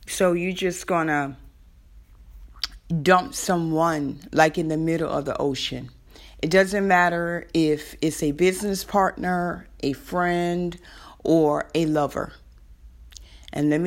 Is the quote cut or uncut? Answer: uncut